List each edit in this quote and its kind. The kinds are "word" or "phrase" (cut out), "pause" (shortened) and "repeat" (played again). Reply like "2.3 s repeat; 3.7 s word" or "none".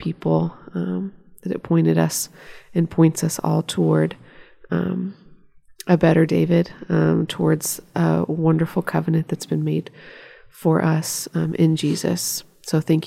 none